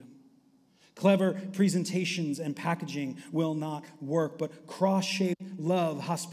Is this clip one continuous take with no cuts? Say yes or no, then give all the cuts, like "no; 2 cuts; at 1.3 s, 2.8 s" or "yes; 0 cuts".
yes; 0 cuts